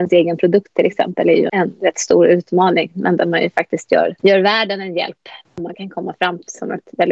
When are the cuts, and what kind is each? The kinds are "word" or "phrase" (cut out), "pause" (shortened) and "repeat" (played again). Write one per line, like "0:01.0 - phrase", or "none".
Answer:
0:01.5 - word
0:04.2 - pause
0:05.4 - pause